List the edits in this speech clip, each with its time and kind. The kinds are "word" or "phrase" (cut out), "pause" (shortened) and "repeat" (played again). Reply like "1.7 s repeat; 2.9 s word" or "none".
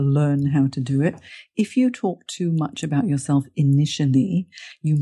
none